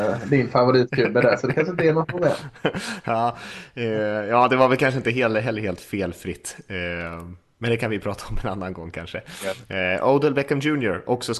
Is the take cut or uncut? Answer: uncut